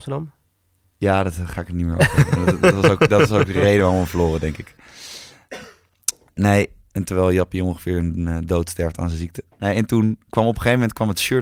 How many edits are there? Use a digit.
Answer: 1